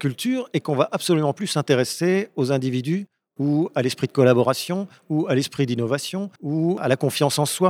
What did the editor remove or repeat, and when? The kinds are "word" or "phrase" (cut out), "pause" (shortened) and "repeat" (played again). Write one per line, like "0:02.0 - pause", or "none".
0:06.4 - pause